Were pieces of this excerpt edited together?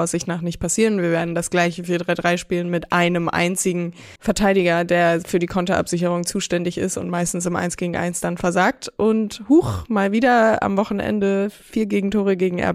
yes; 1 cut; at 4.2 s

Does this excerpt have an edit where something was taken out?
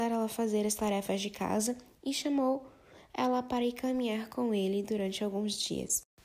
no; 0 cuts

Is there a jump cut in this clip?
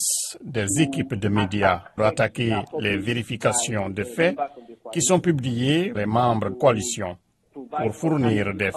yes; 3 cuts; at 2.0 s, 5.9 s, 6.5 s

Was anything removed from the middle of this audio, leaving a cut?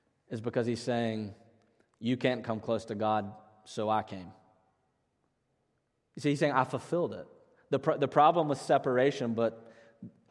no; 0 cuts

